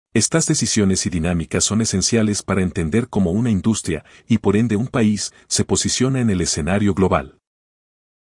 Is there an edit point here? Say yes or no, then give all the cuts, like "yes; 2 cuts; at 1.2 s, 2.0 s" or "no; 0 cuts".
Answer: no; 0 cuts